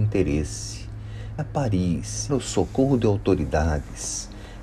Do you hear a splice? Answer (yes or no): yes